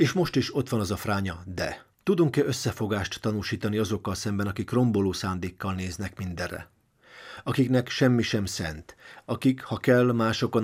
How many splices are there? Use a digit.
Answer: 1